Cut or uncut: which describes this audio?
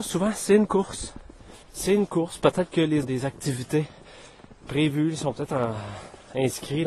cut